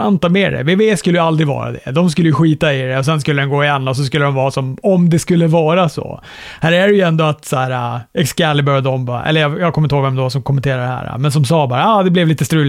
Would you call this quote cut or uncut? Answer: uncut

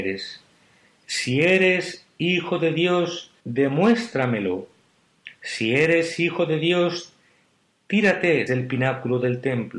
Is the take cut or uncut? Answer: cut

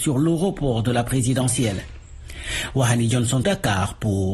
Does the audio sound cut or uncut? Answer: cut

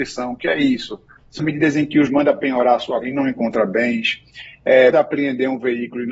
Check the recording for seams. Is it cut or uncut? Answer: cut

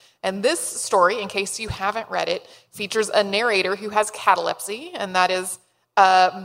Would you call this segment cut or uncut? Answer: uncut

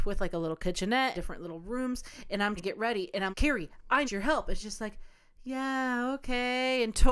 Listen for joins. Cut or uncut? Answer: cut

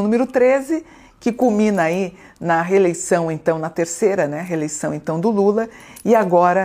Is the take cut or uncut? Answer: uncut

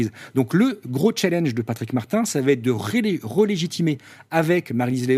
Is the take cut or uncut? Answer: uncut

